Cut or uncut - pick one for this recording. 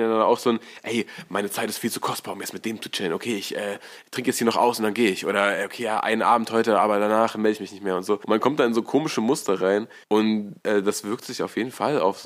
uncut